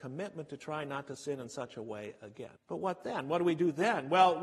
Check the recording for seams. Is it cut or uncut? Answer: cut